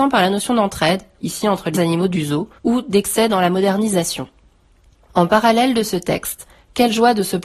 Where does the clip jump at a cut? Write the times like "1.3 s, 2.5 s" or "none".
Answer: 1.7 s, 2.6 s